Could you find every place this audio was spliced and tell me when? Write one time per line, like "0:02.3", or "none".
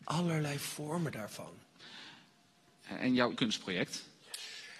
0:03.3